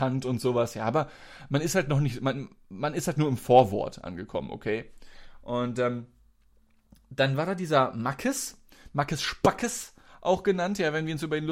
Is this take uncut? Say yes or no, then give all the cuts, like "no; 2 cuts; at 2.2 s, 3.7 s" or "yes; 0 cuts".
yes; 0 cuts